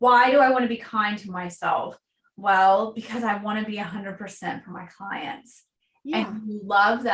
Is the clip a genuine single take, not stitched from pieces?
yes; 0 cuts

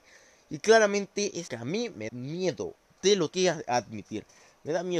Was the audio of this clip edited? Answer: yes; 3 cuts; at 1.5 s, 2.1 s, 3.3 s

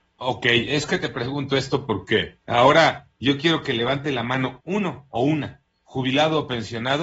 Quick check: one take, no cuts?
no; 2 cuts; at 2.4 s, 4.6 s

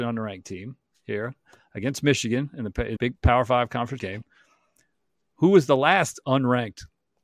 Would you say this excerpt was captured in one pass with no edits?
no; 2 cuts; at 3.0 s, 4.0 s

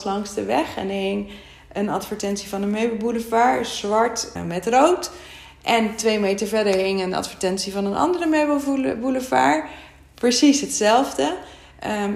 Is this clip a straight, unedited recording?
no; 1 cut; at 4.4 s

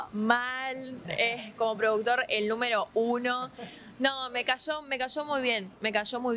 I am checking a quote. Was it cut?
no; 0 cuts

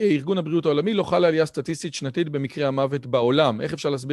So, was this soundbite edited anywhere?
no; 0 cuts

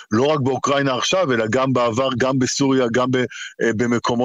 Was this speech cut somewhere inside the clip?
no; 0 cuts

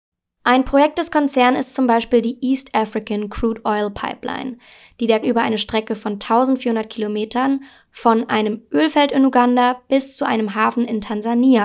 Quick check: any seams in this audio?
yes; 1 cut; at 5.2 s

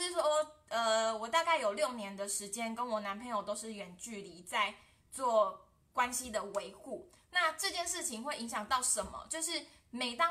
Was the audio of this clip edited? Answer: no; 0 cuts

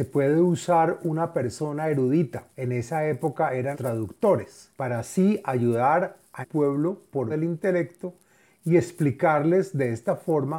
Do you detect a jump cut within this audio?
yes; 5 cuts; at 2.5 s, 3.7 s, 4.7 s, 6.4 s, 7.3 s

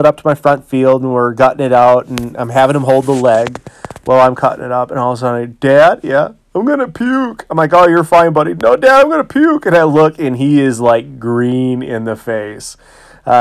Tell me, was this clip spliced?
no; 0 cuts

